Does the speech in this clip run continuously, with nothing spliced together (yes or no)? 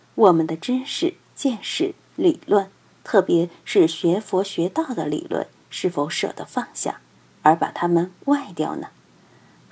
yes